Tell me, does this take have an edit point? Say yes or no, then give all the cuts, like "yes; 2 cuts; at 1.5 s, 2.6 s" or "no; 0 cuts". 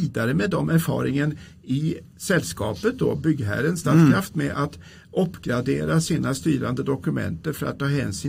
no; 0 cuts